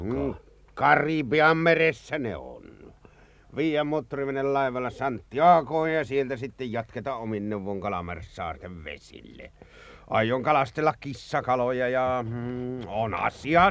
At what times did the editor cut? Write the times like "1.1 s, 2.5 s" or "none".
none